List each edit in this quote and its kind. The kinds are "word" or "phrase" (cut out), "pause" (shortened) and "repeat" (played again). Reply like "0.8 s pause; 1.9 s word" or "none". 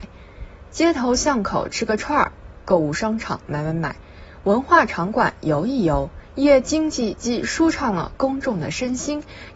6.2 s pause